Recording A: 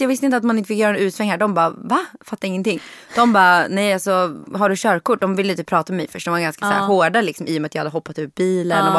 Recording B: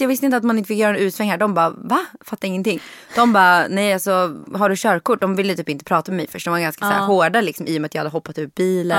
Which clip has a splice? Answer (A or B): A